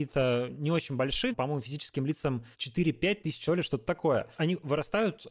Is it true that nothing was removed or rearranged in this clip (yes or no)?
no